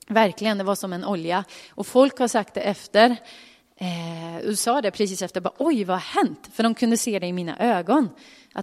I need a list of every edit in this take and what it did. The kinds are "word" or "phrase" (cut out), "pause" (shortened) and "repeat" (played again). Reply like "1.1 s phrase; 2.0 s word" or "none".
none